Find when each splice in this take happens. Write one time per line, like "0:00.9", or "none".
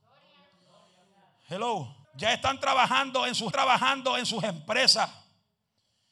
0:02.0
0:03.5